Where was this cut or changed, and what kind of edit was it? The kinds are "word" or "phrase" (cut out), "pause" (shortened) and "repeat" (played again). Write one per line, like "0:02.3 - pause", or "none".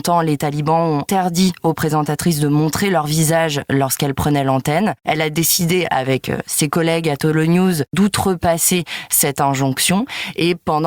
0:01.1 - word